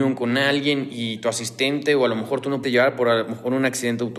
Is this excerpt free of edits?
no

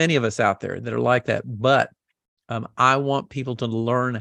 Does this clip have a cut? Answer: no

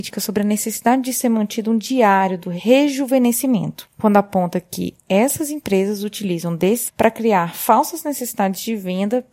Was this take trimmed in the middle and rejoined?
yes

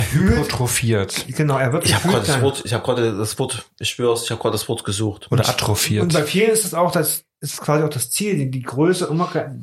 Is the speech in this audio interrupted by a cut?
no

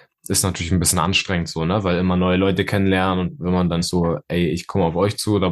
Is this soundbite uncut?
no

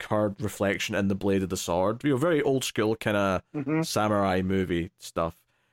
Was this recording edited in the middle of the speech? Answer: no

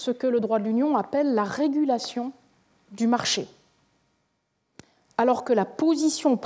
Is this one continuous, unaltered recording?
yes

